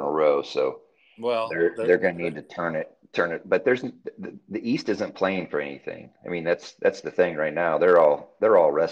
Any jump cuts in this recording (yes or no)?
no